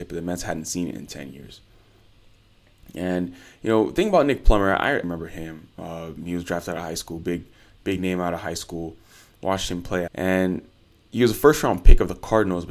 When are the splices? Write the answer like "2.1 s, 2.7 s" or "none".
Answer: 5.0 s, 10.1 s